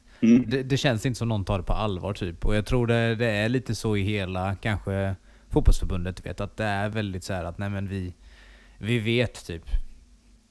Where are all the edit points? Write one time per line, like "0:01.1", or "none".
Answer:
none